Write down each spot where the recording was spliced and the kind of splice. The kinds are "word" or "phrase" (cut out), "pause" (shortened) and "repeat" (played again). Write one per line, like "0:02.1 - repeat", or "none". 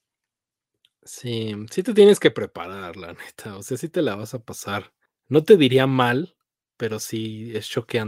0:05.1 - pause